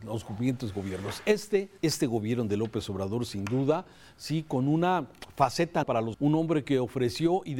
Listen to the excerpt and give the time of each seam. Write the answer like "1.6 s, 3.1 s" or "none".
1.8 s, 5.8 s, 6.1 s

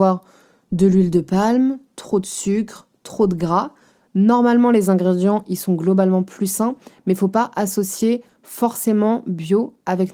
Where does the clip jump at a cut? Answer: none

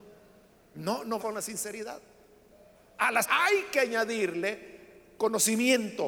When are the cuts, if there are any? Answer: 1.2 s, 3.2 s

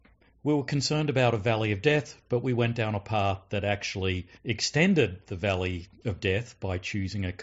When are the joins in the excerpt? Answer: 4.4 s

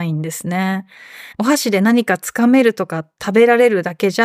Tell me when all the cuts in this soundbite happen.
1.3 s

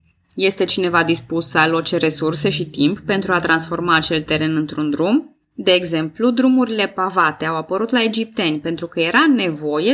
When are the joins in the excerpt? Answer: none

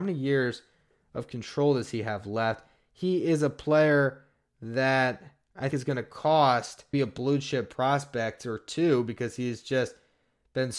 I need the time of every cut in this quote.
5.7 s, 6.9 s

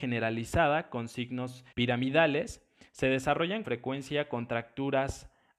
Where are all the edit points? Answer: 1.7 s, 3.6 s

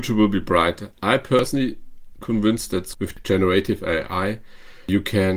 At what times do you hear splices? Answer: 2.2 s, 2.9 s

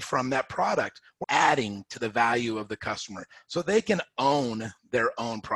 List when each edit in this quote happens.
1.2 s

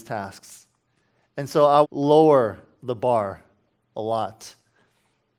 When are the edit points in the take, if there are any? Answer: 1.8 s

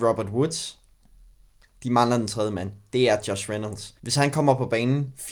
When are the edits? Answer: 4.0 s

